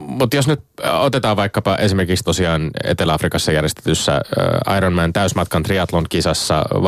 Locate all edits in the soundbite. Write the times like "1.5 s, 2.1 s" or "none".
2.2 s